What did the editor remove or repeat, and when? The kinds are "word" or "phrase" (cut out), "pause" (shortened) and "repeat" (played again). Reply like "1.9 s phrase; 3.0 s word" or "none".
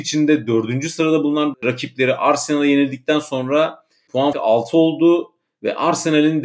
4.3 s word